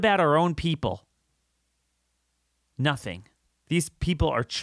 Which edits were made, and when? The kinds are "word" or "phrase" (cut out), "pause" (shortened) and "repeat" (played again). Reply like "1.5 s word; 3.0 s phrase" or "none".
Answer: 3.5 s pause